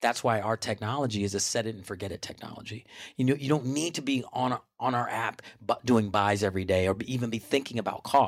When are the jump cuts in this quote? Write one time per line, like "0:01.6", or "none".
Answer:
none